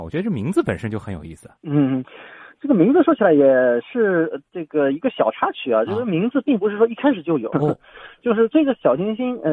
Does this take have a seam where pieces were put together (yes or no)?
yes